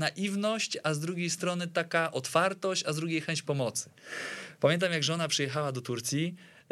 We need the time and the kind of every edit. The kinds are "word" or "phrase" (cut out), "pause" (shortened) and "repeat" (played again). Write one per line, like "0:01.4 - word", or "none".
none